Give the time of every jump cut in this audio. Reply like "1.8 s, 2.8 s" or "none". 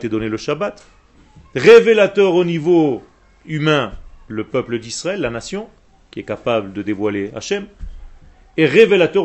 none